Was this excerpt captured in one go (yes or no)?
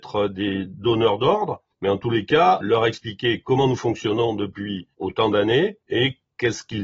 no